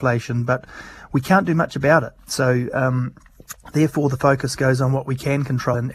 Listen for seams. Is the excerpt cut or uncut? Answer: uncut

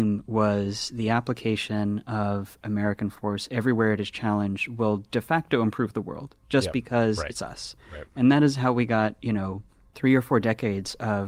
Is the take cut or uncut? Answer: uncut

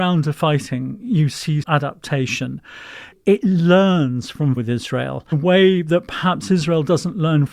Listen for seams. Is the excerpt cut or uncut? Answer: cut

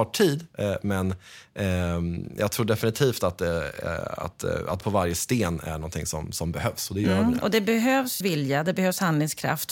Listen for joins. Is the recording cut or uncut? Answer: cut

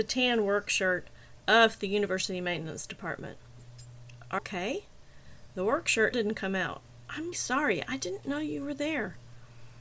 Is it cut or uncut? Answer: cut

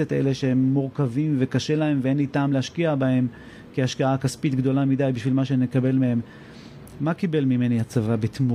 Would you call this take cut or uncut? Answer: uncut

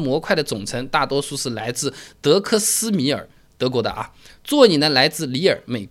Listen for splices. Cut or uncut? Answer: uncut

